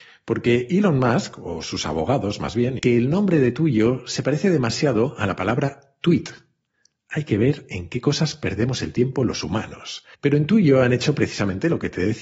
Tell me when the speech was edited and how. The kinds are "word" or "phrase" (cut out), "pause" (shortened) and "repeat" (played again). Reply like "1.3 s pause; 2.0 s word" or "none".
2.8 s phrase; 10.1 s pause